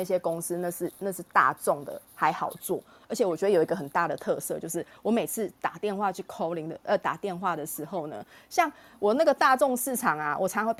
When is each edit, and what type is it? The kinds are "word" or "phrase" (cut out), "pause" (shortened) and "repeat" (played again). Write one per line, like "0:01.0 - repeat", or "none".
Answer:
none

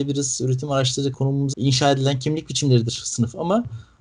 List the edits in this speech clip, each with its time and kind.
0:01.1 - word
0:01.5 - word

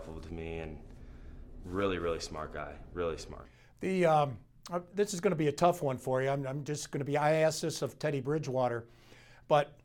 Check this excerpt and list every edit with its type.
none

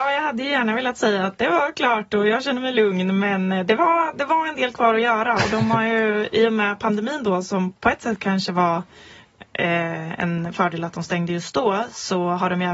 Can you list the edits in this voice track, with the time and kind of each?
none

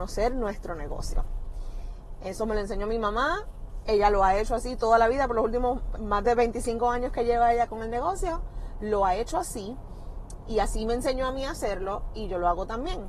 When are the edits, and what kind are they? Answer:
0:06.0 - word

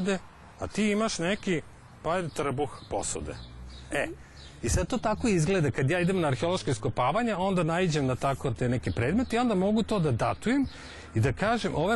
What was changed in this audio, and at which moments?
none

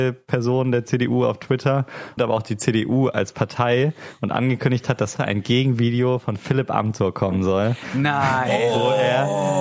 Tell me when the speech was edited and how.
0:02.2 - word
0:05.2 - word

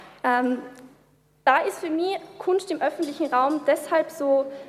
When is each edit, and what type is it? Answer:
none

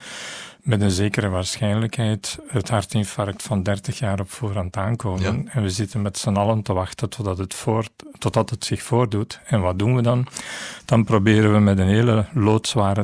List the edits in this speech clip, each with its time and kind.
none

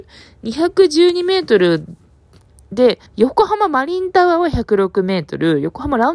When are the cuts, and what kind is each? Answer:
0:03.1 - pause

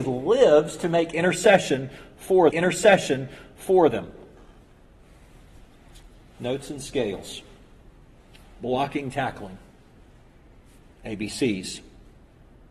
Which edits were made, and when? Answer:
0:02.5 - repeat

